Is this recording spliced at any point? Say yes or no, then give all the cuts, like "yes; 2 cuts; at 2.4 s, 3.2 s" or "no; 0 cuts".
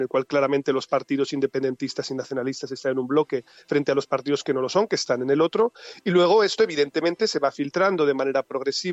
no; 0 cuts